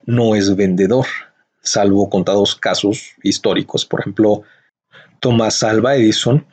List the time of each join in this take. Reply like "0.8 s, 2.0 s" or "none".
none